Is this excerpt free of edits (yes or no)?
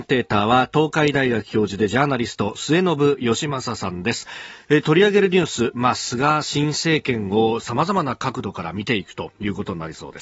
yes